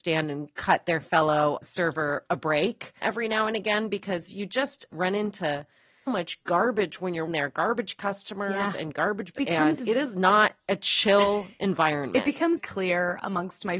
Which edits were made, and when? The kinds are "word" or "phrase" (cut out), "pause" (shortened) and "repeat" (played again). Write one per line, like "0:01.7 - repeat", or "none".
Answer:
0:01.6 - word
0:03.0 - word
0:04.9 - word
0:06.1 - word
0:07.3 - word
0:09.3 - word
0:12.6 - word